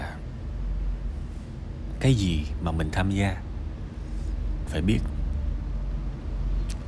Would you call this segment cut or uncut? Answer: cut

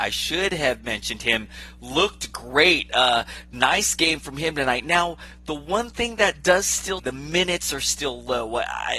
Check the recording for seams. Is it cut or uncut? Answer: cut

